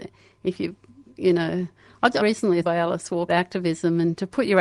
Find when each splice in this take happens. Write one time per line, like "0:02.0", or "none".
0:02.2
0:02.6
0:03.3